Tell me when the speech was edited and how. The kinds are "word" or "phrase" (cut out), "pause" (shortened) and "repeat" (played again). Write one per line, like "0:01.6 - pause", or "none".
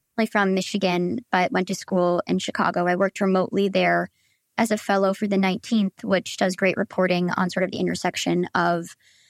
none